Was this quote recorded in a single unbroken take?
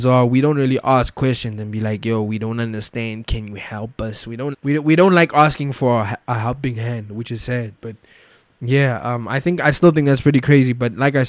no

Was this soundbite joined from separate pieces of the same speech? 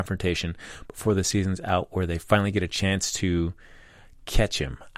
no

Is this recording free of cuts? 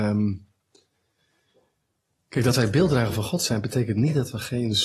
yes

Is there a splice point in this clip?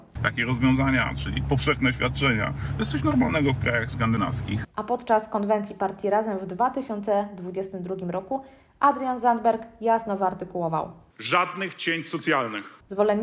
no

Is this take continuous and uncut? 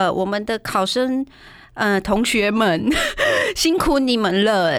yes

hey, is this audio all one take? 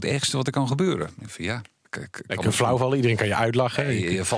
no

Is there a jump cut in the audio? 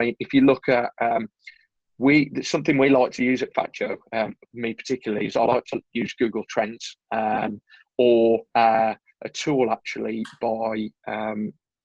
no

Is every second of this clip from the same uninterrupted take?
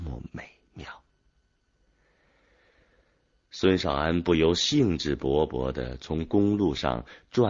yes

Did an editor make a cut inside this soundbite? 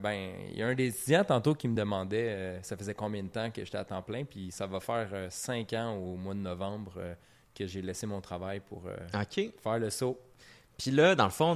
no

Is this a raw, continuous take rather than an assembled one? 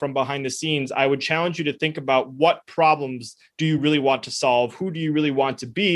yes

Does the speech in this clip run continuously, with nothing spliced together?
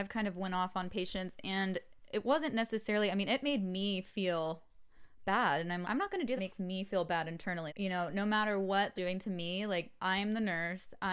no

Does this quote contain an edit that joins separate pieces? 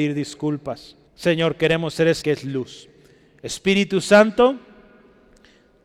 yes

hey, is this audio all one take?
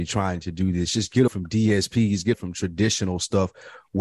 no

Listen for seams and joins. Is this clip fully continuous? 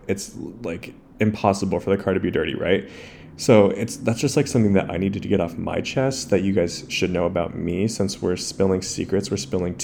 yes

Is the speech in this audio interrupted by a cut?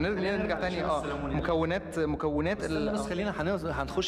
no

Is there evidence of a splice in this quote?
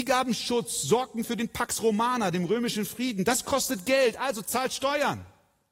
no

